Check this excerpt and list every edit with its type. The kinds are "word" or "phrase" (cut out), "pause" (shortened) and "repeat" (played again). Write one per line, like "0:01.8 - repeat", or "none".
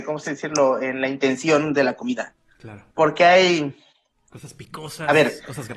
0:02.9 - pause